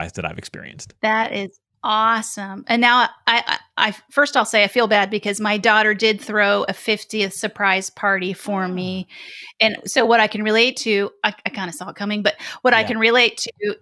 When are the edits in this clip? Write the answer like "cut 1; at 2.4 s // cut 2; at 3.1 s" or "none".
none